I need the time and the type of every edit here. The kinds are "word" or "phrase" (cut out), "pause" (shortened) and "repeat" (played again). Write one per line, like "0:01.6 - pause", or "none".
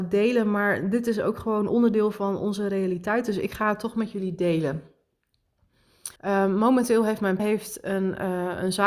0:06.2 - pause
0:07.4 - word